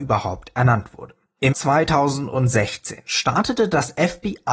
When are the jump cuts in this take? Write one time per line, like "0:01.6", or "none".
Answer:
0:01.5